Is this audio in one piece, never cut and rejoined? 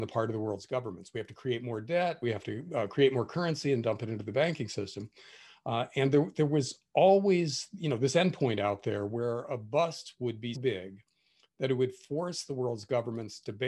no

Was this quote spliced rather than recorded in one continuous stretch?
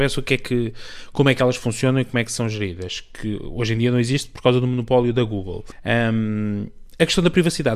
no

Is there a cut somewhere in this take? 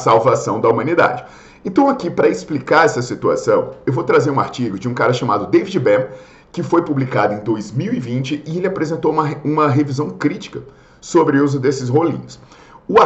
no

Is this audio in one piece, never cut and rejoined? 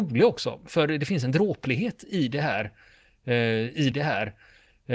no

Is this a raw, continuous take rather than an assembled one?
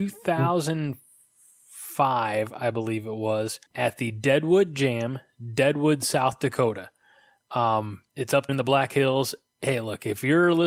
no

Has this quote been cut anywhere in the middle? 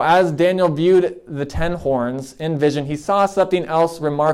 no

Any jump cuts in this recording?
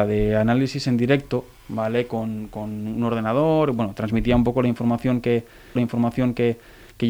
yes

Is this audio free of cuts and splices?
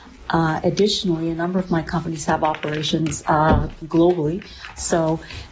yes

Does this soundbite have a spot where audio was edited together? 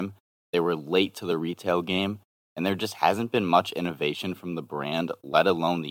no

